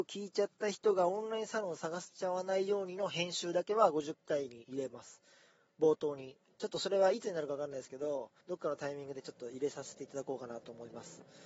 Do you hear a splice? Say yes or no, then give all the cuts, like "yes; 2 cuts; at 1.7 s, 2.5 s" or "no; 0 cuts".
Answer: yes; 1 cut; at 8.4 s